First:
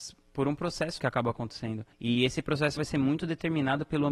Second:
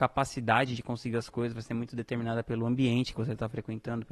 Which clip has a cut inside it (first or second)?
first